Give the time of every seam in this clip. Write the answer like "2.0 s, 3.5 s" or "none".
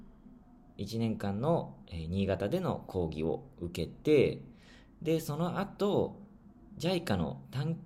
none